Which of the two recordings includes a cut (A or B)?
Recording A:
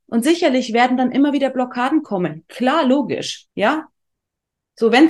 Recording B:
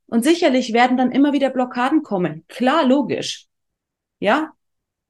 A